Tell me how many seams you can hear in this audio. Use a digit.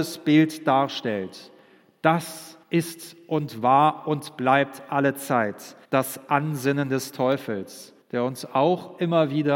3